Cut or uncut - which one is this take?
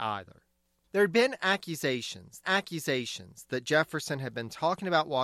cut